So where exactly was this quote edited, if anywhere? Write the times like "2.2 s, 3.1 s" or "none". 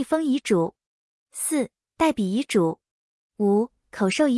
none